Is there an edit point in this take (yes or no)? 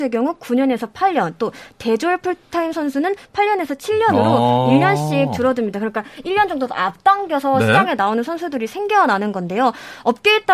no